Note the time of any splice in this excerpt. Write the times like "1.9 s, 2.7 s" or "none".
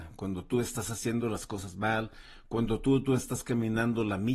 none